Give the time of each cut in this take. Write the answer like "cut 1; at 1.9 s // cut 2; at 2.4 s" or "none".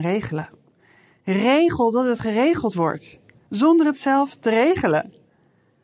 none